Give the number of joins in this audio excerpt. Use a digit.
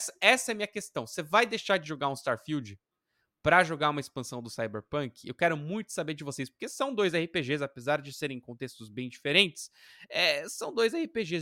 0